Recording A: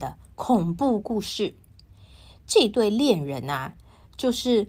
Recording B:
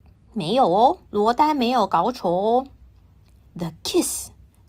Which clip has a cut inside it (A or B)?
B